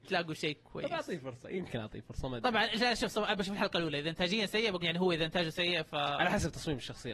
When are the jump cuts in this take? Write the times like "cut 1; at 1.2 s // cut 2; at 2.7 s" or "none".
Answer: cut 1; at 4.8 s